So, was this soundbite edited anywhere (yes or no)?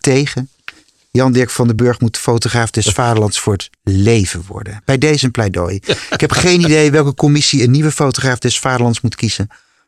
no